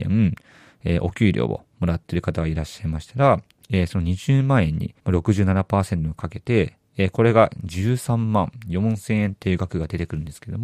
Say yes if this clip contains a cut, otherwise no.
yes